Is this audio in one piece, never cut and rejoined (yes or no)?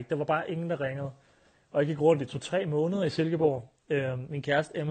yes